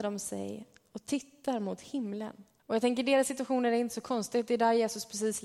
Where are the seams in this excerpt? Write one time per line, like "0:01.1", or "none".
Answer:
0:02.6